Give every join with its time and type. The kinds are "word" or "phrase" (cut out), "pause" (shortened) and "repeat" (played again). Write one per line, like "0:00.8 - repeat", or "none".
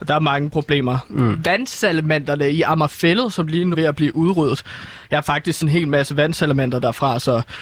0:03.7 - word
0:05.6 - word